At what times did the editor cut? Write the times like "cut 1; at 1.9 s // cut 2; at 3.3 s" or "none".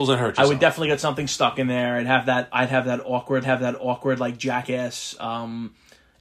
cut 1; at 3.4 s